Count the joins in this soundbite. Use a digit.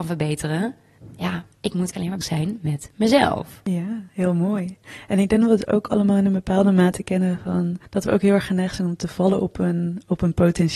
5